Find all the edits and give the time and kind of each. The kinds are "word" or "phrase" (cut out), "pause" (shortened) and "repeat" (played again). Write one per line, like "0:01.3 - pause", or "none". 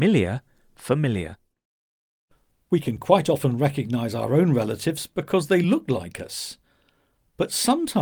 none